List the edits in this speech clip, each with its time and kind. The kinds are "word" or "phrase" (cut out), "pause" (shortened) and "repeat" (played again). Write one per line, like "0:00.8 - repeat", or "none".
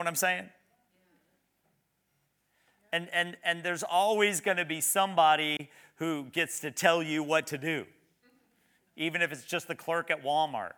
none